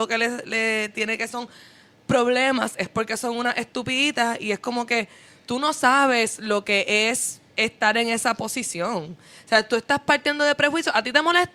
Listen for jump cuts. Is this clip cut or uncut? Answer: uncut